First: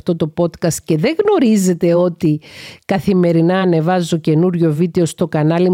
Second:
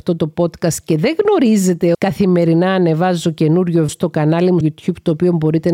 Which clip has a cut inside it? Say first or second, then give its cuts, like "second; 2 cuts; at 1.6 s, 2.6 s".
second; 3 cuts; at 1.9 s, 3.9 s, 4.6 s